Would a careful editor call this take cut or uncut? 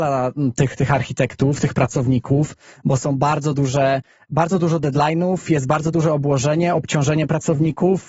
uncut